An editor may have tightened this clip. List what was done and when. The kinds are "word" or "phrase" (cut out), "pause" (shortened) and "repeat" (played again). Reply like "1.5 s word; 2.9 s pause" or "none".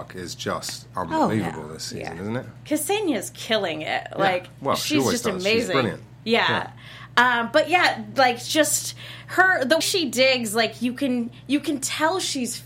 9.8 s word

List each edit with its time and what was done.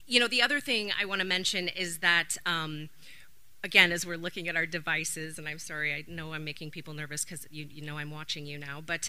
none

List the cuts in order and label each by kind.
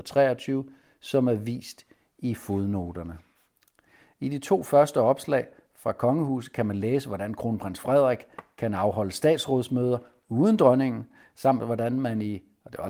none

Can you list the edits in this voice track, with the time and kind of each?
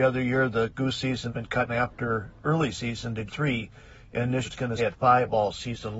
1.3 s word; 1.7 s word; 2.4 s word; 3.3 s word; 4.5 s word; 4.8 s word

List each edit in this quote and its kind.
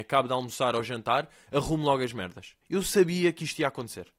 2.6 s pause

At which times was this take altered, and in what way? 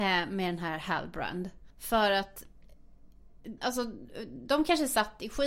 1.7 s pause; 3.6 s word

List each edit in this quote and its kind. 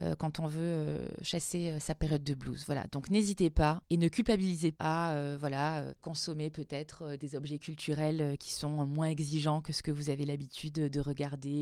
4.7 s word

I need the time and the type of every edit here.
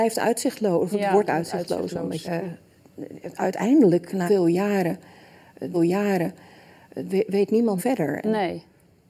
1.3 s word; 2.2 s word; 4.3 s word; 5.7 s repeat; 7.8 s phrase

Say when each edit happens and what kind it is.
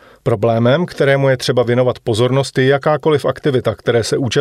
none

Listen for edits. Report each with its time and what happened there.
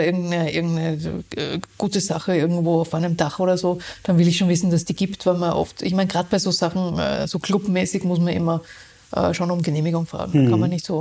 none

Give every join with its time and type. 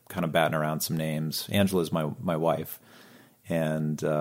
none

